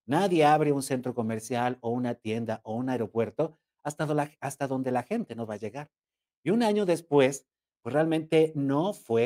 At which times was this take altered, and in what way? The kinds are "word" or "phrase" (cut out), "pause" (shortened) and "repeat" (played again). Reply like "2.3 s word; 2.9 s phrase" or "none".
none